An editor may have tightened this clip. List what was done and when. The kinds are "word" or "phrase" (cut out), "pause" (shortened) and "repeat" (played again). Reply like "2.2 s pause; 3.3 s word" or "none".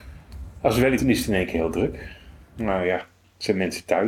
1.0 s word